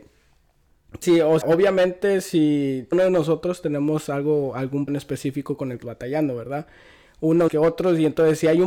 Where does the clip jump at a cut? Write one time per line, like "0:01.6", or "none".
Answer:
0:01.0
0:01.4
0:02.9
0:04.9
0:05.8
0:07.5